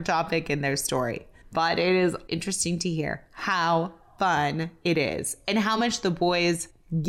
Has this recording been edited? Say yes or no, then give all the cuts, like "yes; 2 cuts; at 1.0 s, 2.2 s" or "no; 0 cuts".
no; 0 cuts